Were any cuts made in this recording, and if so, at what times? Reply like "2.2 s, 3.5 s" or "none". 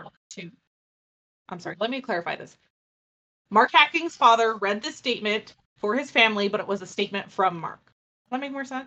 none